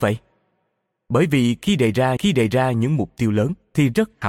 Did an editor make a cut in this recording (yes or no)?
yes